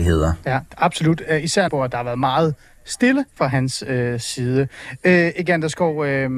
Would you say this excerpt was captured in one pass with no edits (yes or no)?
no